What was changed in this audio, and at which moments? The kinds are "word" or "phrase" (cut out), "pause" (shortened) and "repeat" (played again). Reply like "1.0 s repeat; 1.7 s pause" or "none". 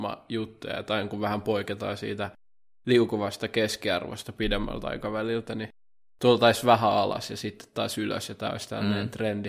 none